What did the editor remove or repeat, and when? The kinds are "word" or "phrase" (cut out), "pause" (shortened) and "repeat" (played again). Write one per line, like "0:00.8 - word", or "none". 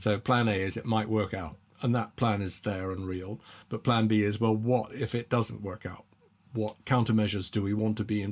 0:01.7 - pause